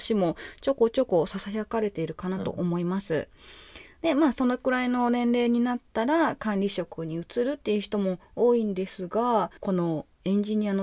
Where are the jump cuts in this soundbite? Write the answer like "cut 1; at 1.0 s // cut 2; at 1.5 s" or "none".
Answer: cut 1; at 9.6 s